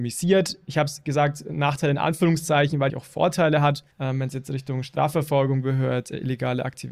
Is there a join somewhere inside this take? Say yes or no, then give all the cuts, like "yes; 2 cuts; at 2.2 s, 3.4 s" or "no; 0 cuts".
yes; 2 cuts; at 2.9 s, 3.9 s